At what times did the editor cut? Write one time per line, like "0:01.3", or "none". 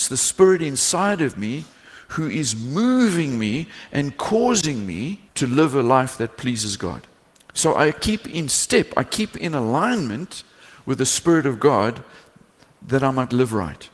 0:05.3
0:07.3